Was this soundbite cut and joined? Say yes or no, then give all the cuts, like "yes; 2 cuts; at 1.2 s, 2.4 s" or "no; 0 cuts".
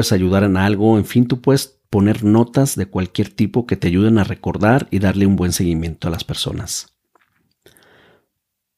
no; 0 cuts